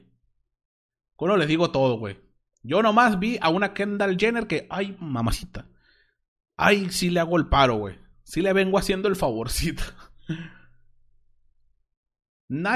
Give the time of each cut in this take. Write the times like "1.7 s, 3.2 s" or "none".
none